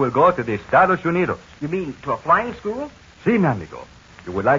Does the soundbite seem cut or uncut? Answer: uncut